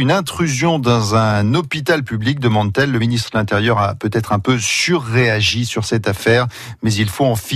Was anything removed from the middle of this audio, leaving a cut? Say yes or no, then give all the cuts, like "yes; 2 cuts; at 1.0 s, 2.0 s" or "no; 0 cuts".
no; 0 cuts